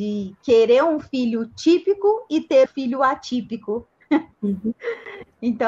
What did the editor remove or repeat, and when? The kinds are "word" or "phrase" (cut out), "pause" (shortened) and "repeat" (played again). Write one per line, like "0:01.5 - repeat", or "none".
0:02.7 - word